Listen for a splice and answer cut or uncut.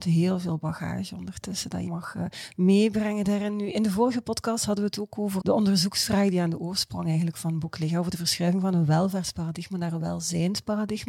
cut